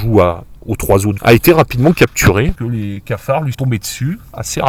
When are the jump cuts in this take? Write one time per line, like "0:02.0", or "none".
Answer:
0:01.2
0:02.6
0:03.5